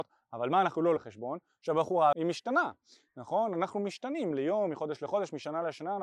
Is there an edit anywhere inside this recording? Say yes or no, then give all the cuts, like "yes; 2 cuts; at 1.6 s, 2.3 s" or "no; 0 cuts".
yes; 3 cuts; at 1.0 s, 2.1 s, 4.3 s